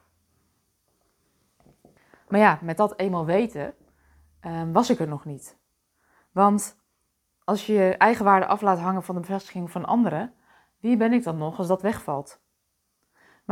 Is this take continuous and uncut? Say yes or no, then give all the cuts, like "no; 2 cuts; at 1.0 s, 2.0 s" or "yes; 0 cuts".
yes; 0 cuts